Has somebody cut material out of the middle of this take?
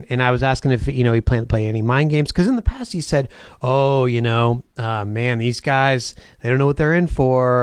no; 0 cuts

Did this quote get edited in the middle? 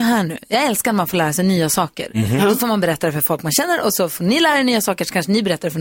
no; 0 cuts

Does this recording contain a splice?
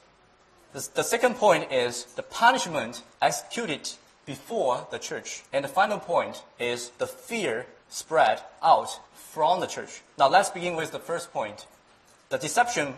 yes; 6 cuts; at 3.1 s, 5.5 s, 7.0 s, 7.8 s, 9.0 s, 10.1 s

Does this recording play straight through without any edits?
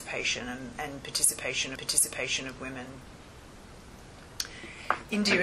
no; 1 cut; at 1.8 s

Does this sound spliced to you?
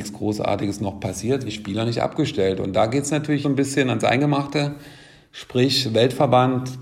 yes; 2 cuts; at 1.5 s, 3.4 s

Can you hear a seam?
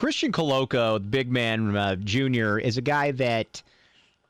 no; 0 cuts

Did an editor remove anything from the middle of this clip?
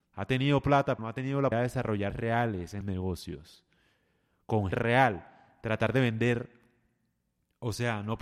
yes; 5 cuts; at 1.0 s, 1.5 s, 2.1 s, 2.8 s, 4.7 s

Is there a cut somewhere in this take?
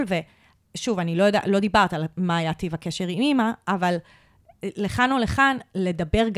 no; 0 cuts

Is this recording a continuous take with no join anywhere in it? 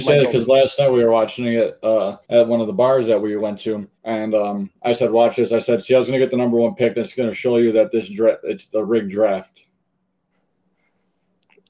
no; 2 cuts; at 2.2 s, 3.9 s

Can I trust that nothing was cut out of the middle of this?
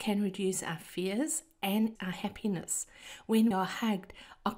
no; 2 cuts; at 2.0 s, 3.5 s

